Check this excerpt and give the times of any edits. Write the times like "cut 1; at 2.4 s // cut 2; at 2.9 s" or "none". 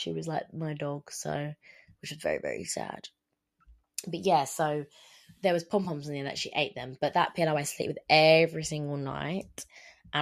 none